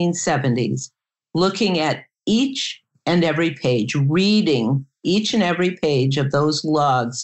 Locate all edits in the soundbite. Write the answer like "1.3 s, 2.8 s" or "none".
none